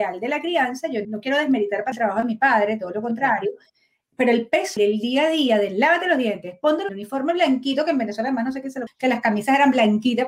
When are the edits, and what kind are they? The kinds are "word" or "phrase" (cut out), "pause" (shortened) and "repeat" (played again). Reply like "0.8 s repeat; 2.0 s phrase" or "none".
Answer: 1.0 s word; 1.9 s word; 4.8 s word; 6.9 s word; 8.9 s word